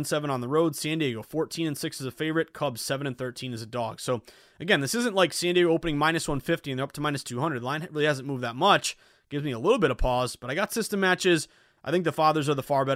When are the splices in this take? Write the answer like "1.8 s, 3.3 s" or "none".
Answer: none

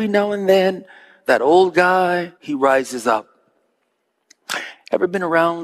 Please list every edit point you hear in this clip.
2.4 s

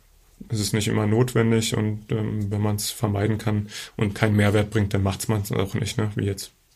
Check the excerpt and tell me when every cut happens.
none

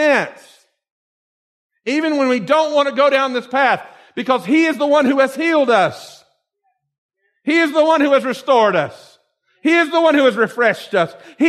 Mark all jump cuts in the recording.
none

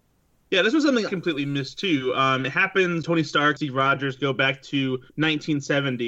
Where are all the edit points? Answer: 1.1 s, 2.4 s, 3.0 s, 3.6 s, 5.1 s

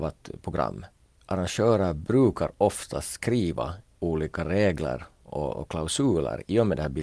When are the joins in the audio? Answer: none

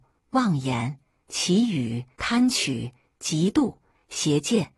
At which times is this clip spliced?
2.1 s

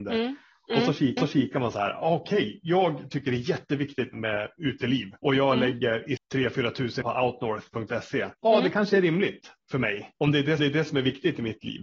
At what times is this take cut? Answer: 1.2 s, 4.1 s, 5.2 s, 6.2 s, 7.0 s, 8.3 s, 10.1 s, 10.6 s

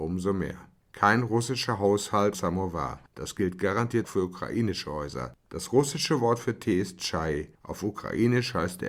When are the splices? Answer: 2.3 s, 4.0 s, 7.5 s

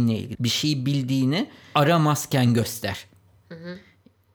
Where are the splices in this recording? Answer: 1.7 s

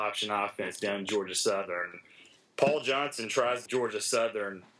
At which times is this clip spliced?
3.7 s

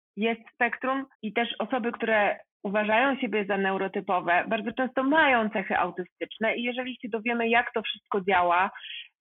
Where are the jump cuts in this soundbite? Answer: 1.1 s

